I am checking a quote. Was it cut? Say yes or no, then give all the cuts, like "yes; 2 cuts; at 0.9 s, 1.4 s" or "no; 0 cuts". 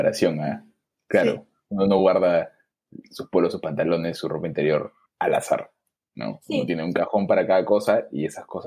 no; 0 cuts